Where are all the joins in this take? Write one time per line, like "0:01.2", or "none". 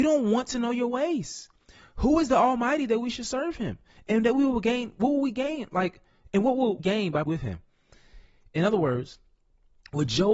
0:06.8
0:07.3